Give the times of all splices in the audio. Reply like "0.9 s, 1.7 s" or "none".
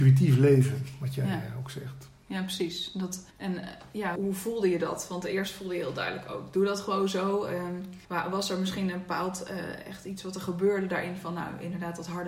3.3 s, 4.2 s, 8.0 s